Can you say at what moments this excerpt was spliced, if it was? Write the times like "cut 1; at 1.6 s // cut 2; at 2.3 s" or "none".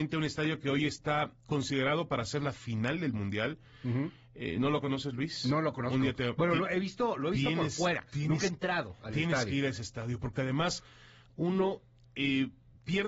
cut 1; at 1.4 s

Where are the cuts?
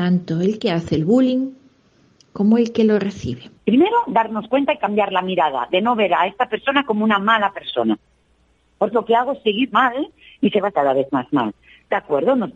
cut 1; at 3.6 s // cut 2; at 8.9 s // cut 3; at 9.7 s // cut 4; at 10.7 s

